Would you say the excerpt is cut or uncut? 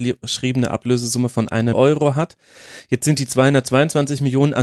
cut